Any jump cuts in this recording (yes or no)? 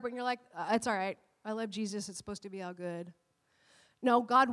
no